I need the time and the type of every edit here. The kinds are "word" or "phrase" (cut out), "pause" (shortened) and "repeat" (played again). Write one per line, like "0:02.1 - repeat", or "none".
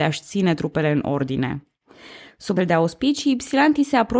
0:02.6 - word